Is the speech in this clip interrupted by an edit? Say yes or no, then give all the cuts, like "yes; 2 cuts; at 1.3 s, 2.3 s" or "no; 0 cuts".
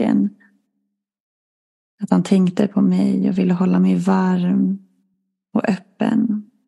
no; 0 cuts